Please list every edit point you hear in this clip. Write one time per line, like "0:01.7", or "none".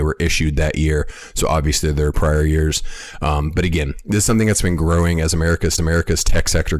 0:02.1
0:05.8